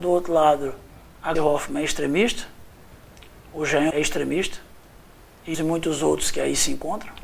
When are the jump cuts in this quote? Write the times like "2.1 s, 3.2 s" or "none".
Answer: 1.3 s, 3.9 s, 5.5 s